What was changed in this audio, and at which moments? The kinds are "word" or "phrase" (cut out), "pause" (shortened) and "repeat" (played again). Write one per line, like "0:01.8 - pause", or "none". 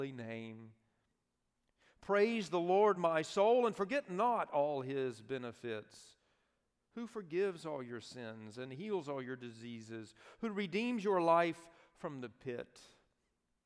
none